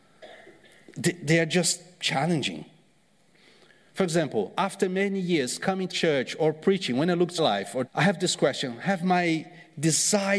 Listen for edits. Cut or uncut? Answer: cut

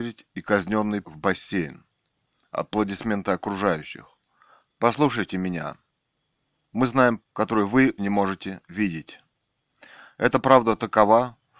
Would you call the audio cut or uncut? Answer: cut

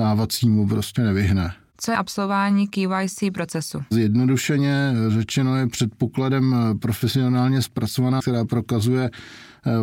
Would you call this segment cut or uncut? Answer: cut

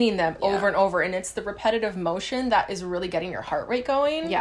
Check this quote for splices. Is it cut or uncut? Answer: uncut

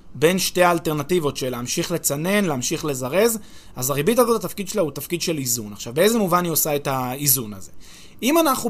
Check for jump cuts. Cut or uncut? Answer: uncut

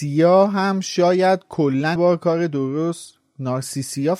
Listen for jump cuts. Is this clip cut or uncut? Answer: cut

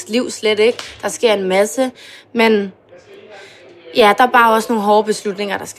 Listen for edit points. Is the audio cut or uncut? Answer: uncut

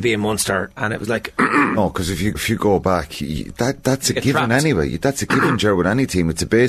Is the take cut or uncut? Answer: cut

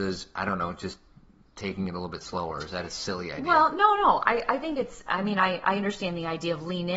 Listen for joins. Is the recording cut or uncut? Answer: uncut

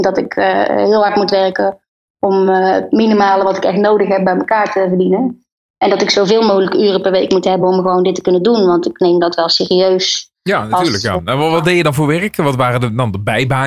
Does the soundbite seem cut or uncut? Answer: uncut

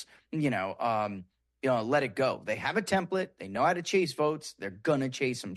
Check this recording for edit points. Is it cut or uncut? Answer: uncut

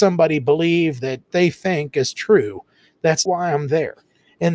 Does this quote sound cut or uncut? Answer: cut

